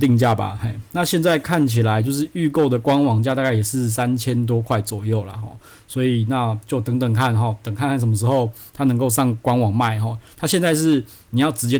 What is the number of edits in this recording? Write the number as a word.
zero